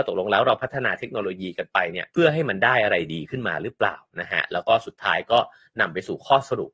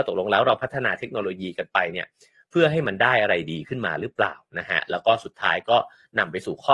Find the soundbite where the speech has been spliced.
first; 1 cut; at 2.1 s

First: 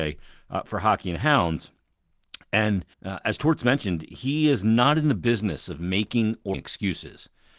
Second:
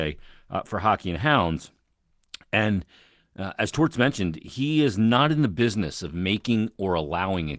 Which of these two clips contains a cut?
first; 2 cuts; at 2.9 s, 6.5 s

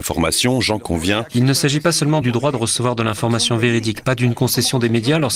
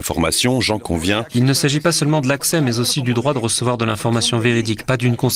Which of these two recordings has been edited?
first; 1 cut; at 2.2 s

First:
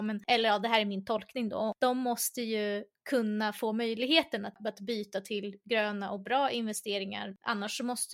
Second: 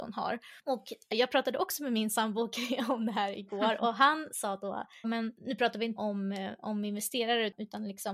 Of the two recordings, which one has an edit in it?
second; 4 cuts; at 1.1 s, 5.0 s, 5.4 s, 6.0 s

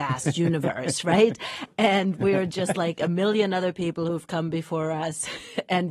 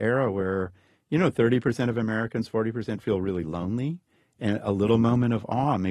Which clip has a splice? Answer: second; 1 cut; at 4.1 s

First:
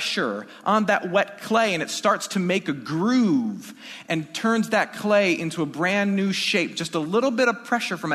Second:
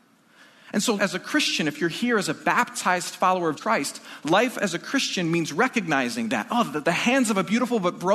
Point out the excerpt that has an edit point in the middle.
second; 3 cuts; at 1.0 s, 3.6 s, 6.8 s

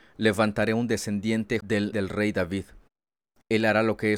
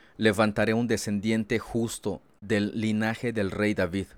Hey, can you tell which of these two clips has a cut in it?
first; 2 cuts; at 1.6 s, 1.9 s

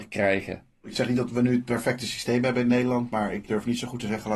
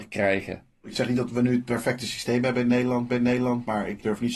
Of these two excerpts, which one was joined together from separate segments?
second; 1 cut; at 3.1 s

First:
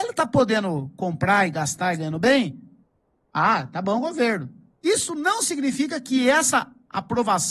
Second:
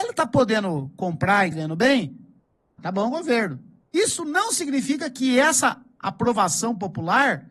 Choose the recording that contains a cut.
second; 2 cuts; at 1.5 s, 2.8 s

